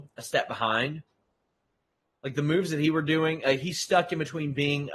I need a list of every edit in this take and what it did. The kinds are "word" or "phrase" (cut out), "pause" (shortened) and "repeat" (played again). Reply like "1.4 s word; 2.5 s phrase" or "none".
none